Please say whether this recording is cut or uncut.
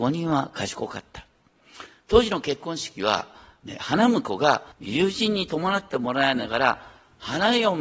cut